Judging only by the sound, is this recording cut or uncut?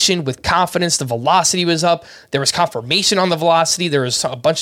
uncut